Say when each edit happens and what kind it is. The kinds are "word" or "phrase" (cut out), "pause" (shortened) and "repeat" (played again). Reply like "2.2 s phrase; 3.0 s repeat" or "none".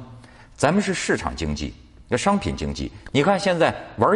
none